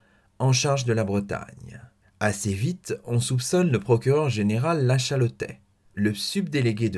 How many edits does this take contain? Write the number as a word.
one